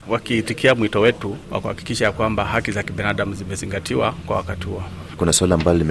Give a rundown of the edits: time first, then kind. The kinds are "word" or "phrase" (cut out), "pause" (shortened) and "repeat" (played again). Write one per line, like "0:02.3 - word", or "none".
none